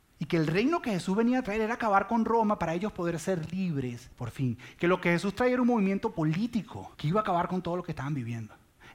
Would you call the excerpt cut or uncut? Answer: cut